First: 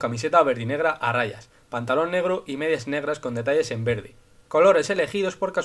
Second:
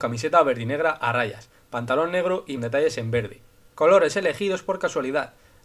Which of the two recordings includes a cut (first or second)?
second